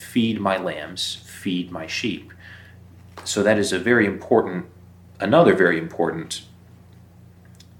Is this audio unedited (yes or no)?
yes